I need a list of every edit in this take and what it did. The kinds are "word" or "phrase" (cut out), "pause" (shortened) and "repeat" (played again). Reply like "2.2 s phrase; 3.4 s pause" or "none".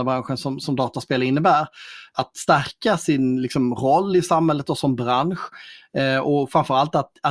none

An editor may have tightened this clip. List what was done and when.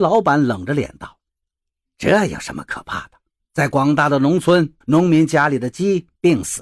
1.3 s pause; 3.4 s pause; 4.8 s pause

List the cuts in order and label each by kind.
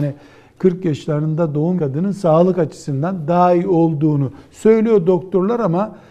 1.8 s word

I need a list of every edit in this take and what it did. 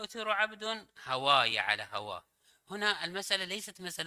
none

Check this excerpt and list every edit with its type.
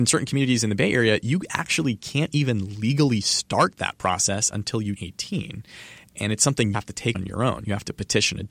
5.0 s word; 6.7 s phrase; 7.1 s word

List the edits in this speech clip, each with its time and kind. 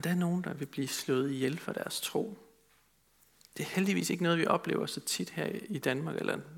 none

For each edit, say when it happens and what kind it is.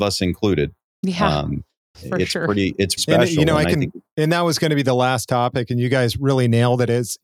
3.0 s word

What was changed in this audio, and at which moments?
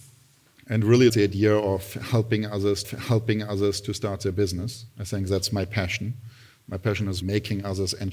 1.1 s word; 2.8 s repeat; 7.2 s word

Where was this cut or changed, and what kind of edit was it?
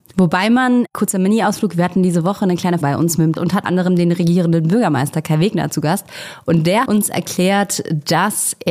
2.8 s word; 3.4 s word; 3.7 s word; 6.9 s word

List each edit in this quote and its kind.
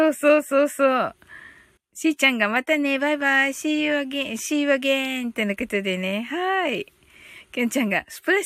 1.8 s pause

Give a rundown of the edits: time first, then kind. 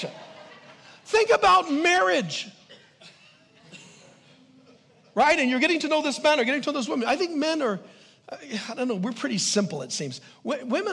none

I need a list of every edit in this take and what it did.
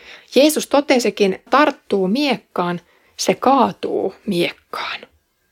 1.5 s word

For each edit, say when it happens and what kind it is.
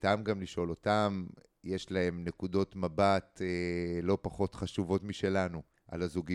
none

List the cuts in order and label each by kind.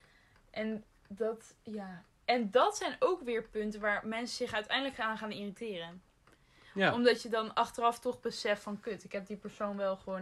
none

